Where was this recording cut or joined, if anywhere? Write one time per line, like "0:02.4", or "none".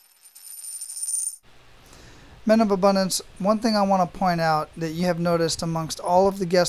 0:05.0